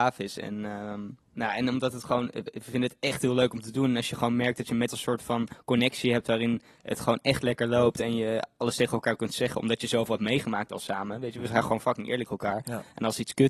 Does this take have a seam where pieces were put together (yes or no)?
yes